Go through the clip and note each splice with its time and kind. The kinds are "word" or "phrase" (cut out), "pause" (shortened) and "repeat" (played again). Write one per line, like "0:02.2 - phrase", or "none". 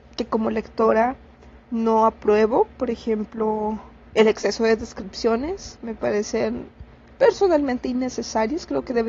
none